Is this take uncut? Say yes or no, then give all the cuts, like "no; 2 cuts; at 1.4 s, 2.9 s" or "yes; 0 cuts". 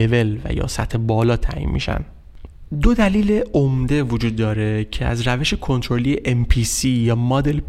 yes; 0 cuts